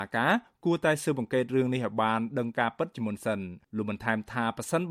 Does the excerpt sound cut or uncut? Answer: cut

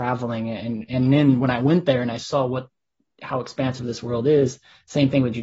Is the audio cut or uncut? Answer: uncut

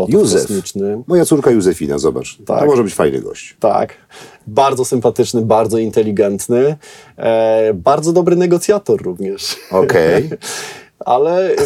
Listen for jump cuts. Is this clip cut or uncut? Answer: uncut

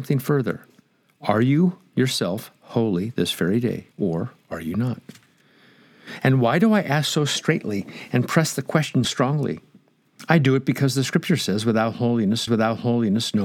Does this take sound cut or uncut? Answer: cut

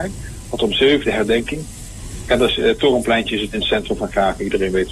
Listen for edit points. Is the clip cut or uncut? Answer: cut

